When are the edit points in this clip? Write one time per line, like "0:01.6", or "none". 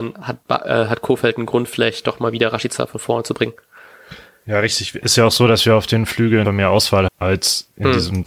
0:06.4
0:07.1